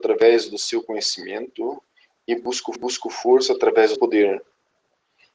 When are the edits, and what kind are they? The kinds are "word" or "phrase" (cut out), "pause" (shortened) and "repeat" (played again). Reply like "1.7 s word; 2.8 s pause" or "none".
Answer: 2.8 s repeat; 4.0 s word